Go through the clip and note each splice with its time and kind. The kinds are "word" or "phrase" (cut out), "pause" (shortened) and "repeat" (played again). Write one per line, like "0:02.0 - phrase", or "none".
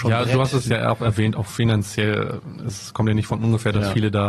none